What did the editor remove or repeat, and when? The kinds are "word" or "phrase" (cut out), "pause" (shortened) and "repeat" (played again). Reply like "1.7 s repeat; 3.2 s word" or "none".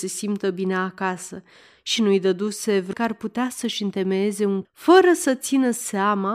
2.0 s word; 2.9 s word; 4.6 s word